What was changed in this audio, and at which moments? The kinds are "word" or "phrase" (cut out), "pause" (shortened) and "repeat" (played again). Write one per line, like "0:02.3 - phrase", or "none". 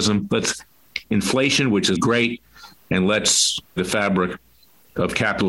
0:01.0 - word
0:01.9 - word
0:03.8 - word